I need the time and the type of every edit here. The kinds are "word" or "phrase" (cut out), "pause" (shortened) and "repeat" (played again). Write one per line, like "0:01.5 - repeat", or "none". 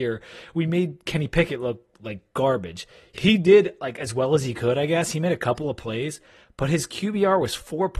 none